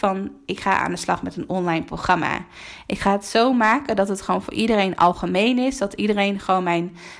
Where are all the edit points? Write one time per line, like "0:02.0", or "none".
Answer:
none